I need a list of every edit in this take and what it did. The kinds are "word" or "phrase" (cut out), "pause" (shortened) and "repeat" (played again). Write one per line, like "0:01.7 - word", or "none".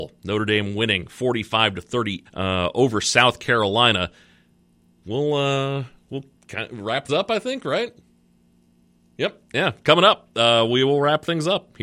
0:02.3 - word
0:06.3 - pause
0:07.1 - word